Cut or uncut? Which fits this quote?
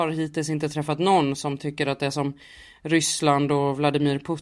uncut